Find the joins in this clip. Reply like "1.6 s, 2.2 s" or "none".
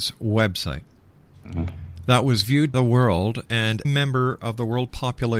2.7 s, 3.8 s